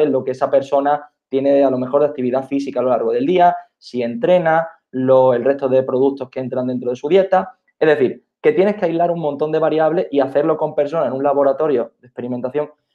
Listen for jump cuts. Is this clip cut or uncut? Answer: uncut